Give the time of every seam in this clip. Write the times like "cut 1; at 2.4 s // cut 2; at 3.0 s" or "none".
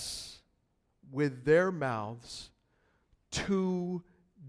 none